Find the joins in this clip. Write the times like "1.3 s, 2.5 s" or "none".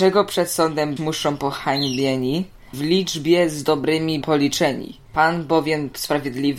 1.0 s, 2.7 s, 4.2 s

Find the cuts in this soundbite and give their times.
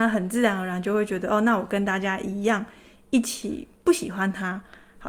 3.7 s

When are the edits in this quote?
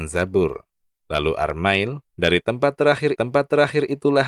2.1 s, 3.2 s

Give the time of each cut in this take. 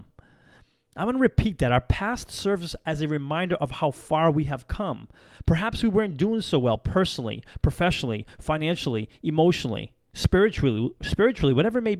none

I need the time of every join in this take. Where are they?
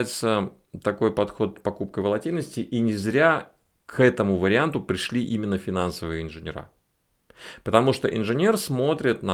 none

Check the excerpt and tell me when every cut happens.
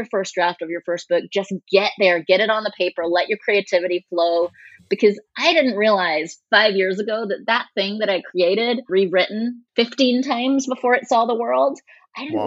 8.9 s, 9.7 s

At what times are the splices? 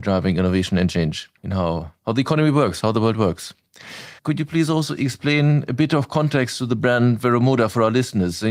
1.4 s, 4.2 s

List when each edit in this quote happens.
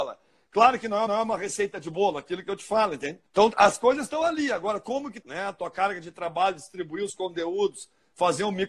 1.1 s, 3.3 s, 5.2 s

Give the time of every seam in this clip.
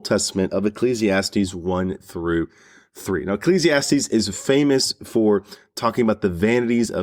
none

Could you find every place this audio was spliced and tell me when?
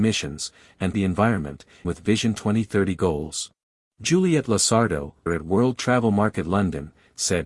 0.9 s, 1.8 s, 3.7 s, 5.3 s

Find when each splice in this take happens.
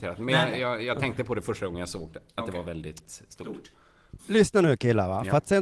4.2 s

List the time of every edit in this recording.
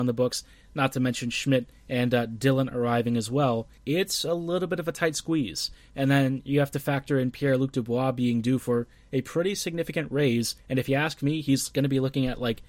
3.8 s, 10.6 s

